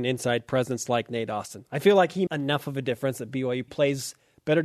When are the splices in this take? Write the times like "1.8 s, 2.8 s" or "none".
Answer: 2.3 s, 3.7 s